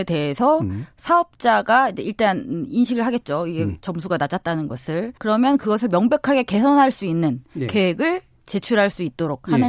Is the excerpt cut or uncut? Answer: cut